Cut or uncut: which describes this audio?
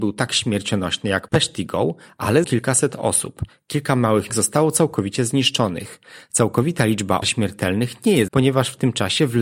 cut